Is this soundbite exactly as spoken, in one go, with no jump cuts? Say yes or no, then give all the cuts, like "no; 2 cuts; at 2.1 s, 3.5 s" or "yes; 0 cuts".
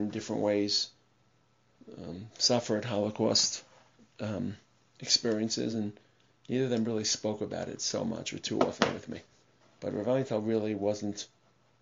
yes; 0 cuts